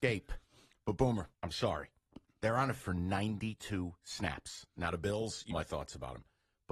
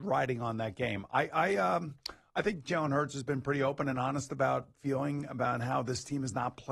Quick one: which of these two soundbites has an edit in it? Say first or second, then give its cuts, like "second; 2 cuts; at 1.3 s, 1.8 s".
first; 3 cuts; at 1.3 s, 2.8 s, 5.5 s